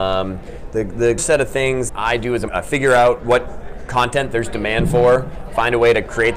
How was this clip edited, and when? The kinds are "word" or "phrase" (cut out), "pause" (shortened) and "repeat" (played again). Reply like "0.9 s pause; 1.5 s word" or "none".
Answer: 1.2 s word; 1.9 s word; 2.5 s word; 3.2 s word